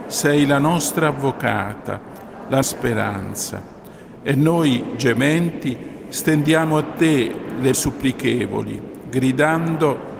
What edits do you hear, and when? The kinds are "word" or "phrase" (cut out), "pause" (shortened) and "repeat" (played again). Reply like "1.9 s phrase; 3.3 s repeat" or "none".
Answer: 2.6 s word; 7.7 s word